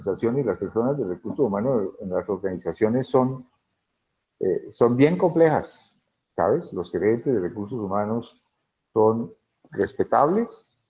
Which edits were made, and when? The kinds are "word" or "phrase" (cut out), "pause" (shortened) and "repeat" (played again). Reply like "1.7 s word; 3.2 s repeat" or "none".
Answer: none